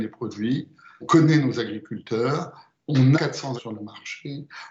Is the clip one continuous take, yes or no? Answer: no